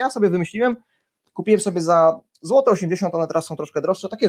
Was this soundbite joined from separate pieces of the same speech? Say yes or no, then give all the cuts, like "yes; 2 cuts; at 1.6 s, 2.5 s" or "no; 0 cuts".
no; 0 cuts